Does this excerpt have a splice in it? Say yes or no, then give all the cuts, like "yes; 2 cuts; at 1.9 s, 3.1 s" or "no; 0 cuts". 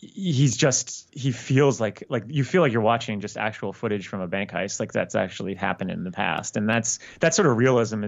no; 0 cuts